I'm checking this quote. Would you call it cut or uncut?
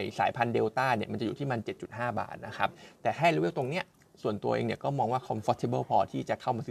uncut